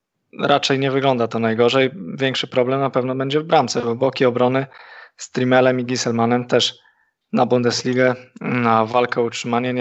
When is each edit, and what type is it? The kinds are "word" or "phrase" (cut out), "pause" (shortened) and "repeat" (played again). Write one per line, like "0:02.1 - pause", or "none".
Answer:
none